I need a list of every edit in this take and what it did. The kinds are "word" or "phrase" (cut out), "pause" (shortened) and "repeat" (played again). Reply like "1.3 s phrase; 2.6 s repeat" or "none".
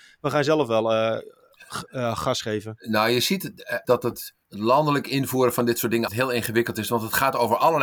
3.8 s word; 4.4 s pause; 6.1 s word